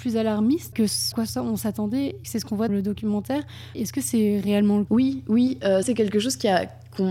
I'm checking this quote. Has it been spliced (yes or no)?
yes